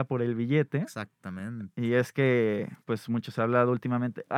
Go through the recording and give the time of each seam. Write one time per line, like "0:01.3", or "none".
0:02.8